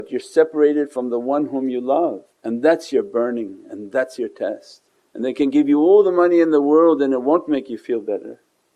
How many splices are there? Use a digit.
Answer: 2